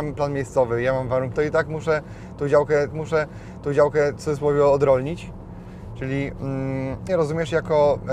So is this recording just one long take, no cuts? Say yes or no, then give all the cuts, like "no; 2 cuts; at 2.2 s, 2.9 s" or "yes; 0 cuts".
no; 3 cuts; at 1.3 s, 2.9 s, 7.1 s